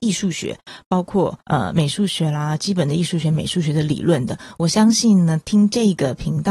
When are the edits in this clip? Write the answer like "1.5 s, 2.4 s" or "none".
1.4 s